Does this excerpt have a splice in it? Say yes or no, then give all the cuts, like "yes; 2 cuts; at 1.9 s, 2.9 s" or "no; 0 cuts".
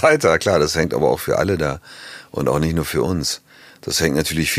no; 0 cuts